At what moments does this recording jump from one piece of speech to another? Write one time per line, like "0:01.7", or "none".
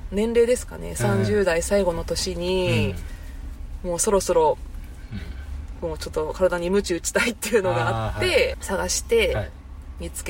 0:08.5